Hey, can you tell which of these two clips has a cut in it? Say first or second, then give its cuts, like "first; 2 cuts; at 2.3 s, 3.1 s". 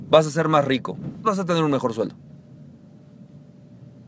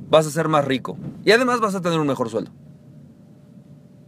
first; 1 cut; at 1.2 s